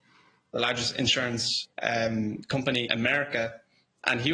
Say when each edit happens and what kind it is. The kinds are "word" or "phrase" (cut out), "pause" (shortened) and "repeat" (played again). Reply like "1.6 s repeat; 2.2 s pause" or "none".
1.7 s pause; 2.9 s word